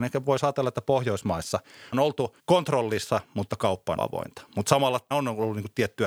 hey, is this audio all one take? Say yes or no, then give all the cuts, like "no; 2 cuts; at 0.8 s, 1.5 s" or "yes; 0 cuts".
no; 4 cuts; at 1.9 s, 2.4 s, 4.0 s, 5.1 s